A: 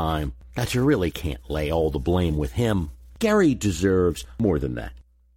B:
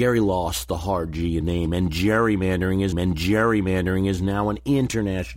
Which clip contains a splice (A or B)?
B